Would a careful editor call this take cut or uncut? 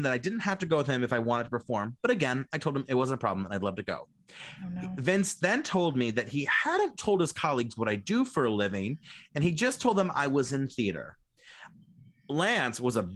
uncut